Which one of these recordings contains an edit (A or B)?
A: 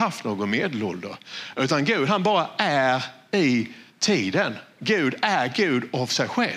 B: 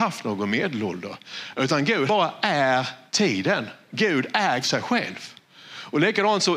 B